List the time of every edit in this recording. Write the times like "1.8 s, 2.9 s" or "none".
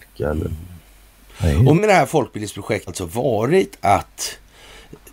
1.8 s, 2.9 s